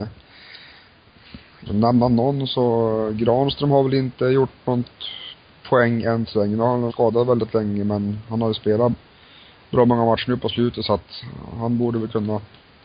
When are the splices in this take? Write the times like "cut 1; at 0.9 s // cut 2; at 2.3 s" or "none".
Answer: cut 1; at 1.7 s // cut 2; at 6.9 s